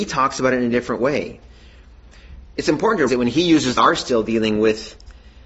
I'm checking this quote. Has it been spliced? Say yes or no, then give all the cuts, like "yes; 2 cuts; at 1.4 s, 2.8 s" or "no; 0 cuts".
yes; 2 cuts; at 3.1 s, 3.8 s